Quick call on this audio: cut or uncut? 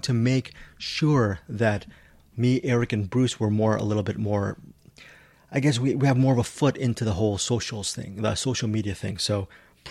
uncut